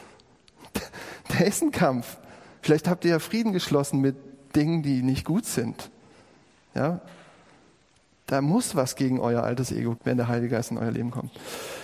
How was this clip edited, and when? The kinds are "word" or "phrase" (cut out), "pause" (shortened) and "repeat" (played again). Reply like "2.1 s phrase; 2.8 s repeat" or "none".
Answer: 10.0 s word